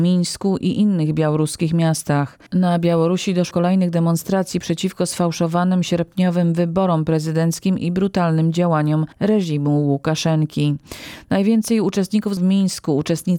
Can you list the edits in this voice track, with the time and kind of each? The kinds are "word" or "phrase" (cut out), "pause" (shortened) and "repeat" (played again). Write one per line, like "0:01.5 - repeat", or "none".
0:03.5 - word
0:09.1 - pause
0:12.4 - phrase